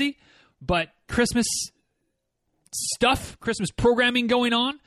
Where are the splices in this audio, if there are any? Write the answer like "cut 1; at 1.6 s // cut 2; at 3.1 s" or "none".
cut 1; at 1.1 s // cut 2; at 3.4 s